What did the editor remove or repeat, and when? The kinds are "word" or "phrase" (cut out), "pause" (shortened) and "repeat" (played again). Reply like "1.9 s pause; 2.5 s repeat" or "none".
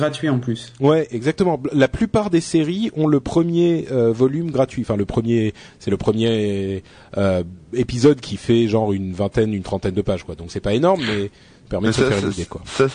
none

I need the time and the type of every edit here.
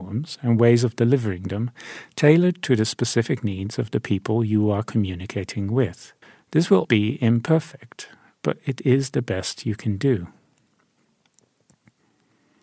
6.2 s pause; 6.8 s word

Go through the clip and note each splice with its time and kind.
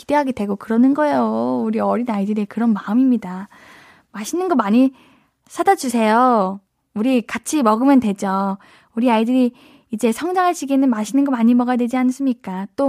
none

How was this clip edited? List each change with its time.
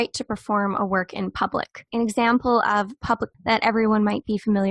1.9 s pause; 3.3 s word

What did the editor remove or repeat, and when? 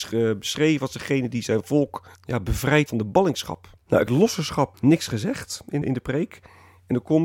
2.1 s pause; 2.9 s word; 3.8 s pause; 4.1 s phrase; 4.7 s word; 5.8 s word

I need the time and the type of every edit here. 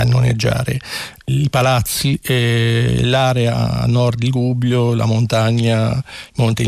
none

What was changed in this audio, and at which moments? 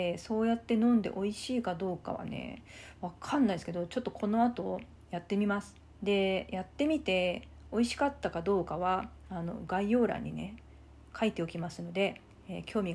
5.8 s pause

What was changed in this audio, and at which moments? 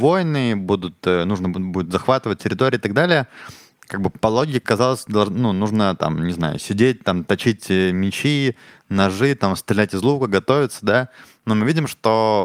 none

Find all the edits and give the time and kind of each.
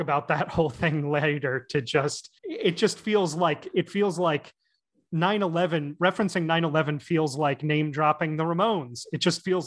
2.4 s pause

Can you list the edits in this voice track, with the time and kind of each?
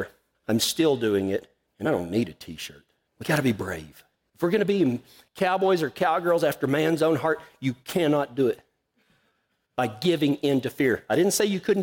none

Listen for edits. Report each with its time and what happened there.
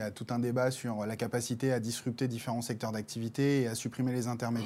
none

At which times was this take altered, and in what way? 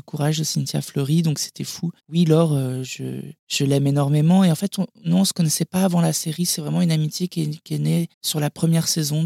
2.0 s pause; 3.4 s pause; 8.1 s pause

